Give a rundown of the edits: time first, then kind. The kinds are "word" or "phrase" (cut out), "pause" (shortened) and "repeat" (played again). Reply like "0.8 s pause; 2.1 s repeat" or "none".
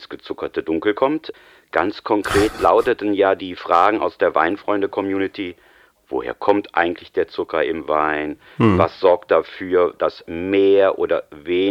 none